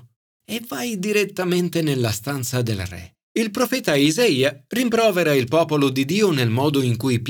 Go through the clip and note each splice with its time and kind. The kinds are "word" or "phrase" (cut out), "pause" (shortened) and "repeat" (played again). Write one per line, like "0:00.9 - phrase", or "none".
0:03.3 - pause

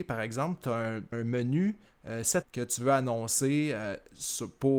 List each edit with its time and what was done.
0:01.1 - word
0:02.4 - word

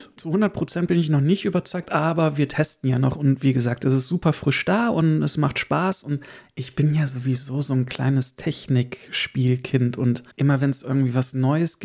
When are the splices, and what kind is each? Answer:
0:10.3 - pause

